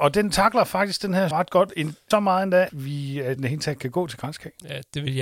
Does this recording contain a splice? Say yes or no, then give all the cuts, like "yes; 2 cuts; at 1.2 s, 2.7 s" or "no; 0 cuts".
yes; 4 cuts; at 1.3 s, 2.1 s, 2.7 s, 3.4 s